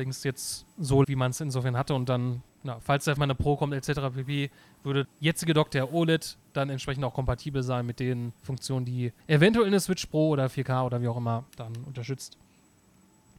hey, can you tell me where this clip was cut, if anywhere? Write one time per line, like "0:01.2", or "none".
0:01.0
0:02.5
0:03.2
0:05.0
0:08.4
0:09.2
0:11.5